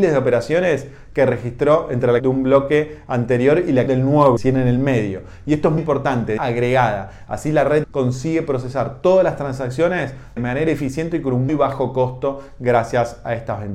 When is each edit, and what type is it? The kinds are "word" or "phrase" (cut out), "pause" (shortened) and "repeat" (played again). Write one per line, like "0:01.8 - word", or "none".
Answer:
0:02.2 - word
0:03.9 - word
0:04.4 - word
0:05.8 - word
0:06.4 - word
0:07.8 - word
0:10.4 - word
0:11.5 - word